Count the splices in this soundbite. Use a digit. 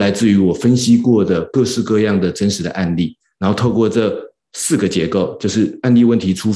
0